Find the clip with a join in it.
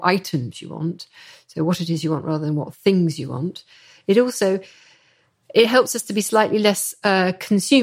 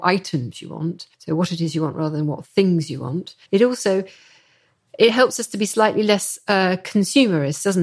second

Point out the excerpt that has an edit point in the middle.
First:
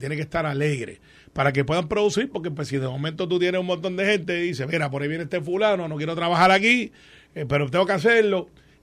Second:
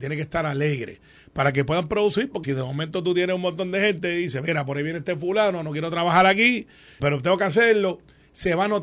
second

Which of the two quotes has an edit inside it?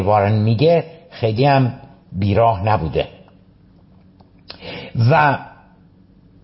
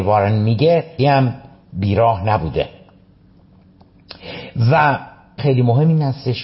second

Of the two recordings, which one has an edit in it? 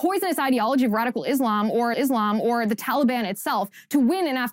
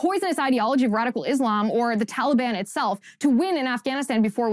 first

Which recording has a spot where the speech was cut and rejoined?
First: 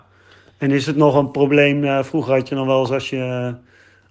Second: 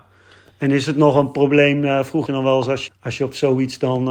second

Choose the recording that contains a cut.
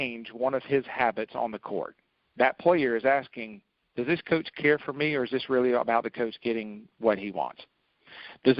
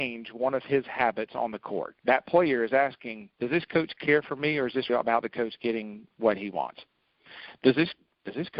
second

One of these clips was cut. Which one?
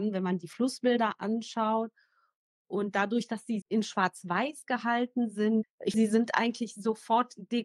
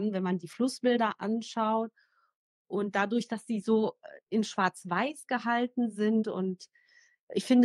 first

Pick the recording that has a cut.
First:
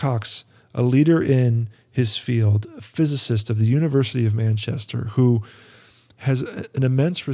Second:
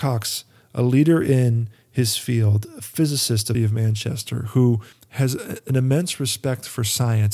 second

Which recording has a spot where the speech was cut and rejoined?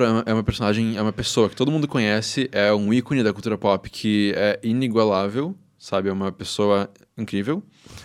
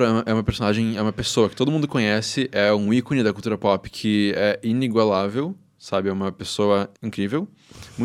second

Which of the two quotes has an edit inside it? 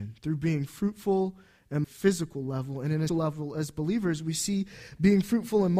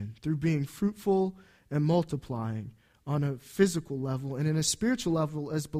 first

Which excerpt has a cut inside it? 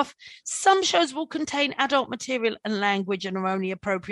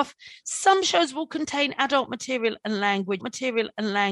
second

